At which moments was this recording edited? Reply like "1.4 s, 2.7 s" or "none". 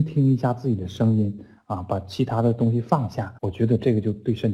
3.4 s